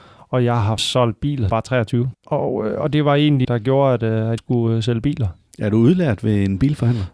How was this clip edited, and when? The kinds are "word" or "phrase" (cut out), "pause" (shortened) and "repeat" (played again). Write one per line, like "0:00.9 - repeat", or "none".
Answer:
0:01.5 - phrase
0:02.1 - pause
0:03.4 - phrase
0:04.4 - word